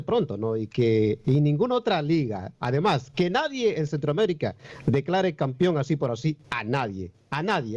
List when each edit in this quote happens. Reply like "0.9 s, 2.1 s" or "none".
none